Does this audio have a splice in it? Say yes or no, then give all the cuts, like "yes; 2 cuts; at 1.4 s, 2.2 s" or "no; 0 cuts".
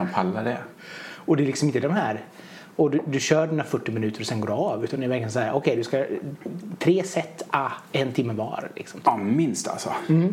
yes; 1 cut; at 7.9 s